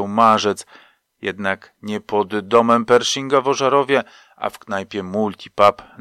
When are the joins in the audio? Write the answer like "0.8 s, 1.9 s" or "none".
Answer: none